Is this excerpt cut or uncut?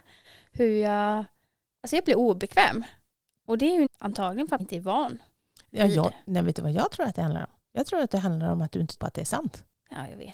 cut